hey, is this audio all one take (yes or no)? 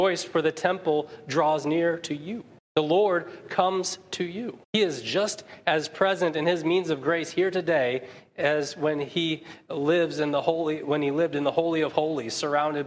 no